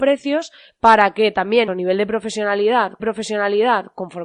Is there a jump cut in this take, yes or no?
yes